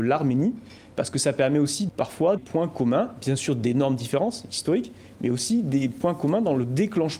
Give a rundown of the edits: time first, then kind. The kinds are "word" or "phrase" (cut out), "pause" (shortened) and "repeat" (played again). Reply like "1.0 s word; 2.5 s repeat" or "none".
1.9 s word; 2.4 s word